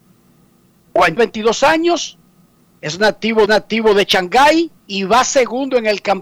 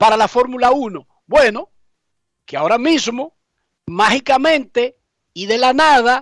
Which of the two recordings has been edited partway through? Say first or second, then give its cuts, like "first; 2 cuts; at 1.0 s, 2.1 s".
first; 3 cuts; at 1.2 s, 3.5 s, 4.8 s